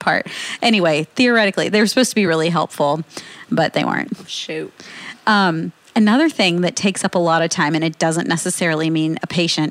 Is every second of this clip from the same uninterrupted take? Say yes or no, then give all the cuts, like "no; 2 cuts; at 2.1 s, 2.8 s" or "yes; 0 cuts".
yes; 0 cuts